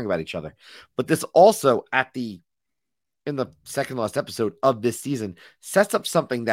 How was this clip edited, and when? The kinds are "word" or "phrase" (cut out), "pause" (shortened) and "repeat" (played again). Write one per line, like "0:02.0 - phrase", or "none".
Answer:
none